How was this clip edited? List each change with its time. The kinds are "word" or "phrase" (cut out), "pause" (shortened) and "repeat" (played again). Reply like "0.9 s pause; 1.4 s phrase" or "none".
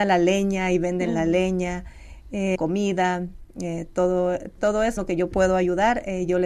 2.5 s word; 4.6 s word; 5.0 s word